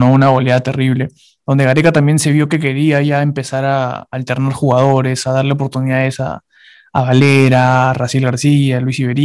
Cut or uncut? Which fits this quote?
uncut